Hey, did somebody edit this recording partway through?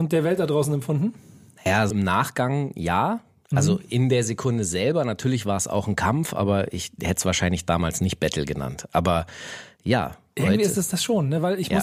yes; 1 cut; at 1.9 s

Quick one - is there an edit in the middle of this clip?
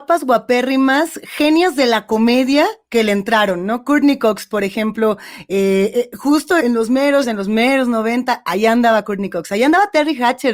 yes; 2 cuts; at 6.6 s, 7.2 s

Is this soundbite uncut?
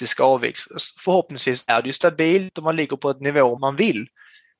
no; 1 cut; at 3.6 s

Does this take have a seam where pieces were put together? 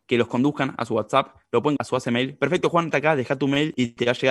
yes; 2 cuts; at 1.8 s, 2.9 s

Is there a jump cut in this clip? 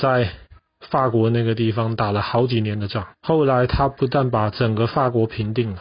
yes; 1 cut; at 3.2 s

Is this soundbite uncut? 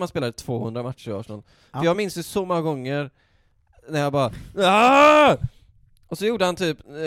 yes; 0 cuts

